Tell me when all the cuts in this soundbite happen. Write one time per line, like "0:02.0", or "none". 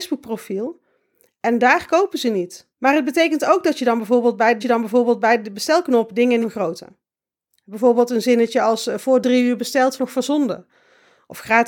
0:02.7
0:04.6
0:06.4
0:10.0